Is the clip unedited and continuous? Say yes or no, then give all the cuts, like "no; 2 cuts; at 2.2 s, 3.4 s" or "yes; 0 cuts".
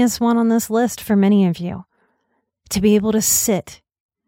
yes; 0 cuts